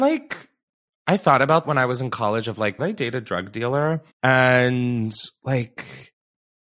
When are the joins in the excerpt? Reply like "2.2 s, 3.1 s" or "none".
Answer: 1.6 s, 2.8 s, 4.1 s